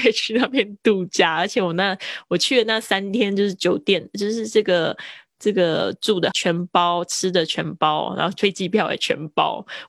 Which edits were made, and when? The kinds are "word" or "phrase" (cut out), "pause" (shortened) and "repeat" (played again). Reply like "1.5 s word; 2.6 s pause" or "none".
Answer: 6.3 s word